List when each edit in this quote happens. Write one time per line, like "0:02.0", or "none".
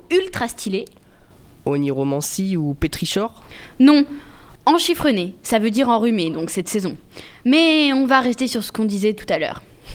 none